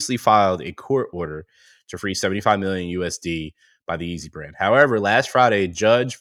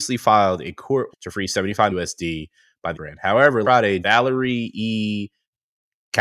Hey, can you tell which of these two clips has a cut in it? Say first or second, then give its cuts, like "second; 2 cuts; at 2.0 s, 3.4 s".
second; 5 cuts; at 1.1 s, 1.9 s, 2.9 s, 3.6 s, 4.0 s